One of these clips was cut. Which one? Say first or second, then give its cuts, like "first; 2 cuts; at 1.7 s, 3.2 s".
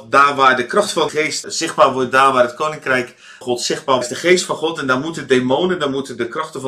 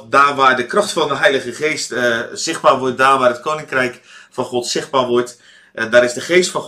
first; 4 cuts; at 1.1 s, 1.4 s, 3.4 s, 4.0 s